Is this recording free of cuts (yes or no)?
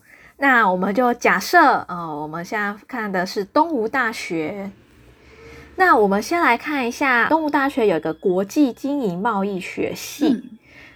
no